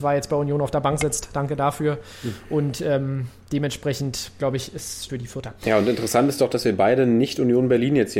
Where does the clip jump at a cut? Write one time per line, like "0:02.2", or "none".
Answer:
0:05.1